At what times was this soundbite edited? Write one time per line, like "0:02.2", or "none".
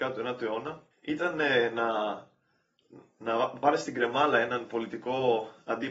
0:00.9